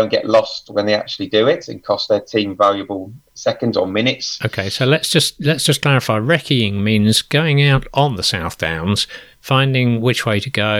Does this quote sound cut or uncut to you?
uncut